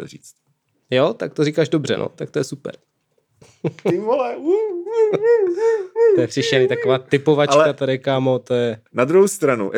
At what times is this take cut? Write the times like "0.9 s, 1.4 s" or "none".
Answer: 8.9 s